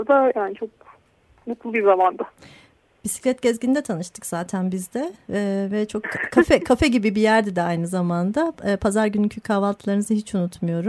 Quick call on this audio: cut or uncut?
uncut